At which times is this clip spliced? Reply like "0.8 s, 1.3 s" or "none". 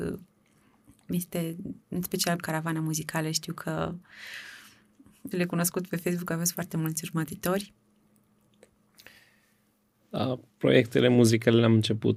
2.4 s, 5.3 s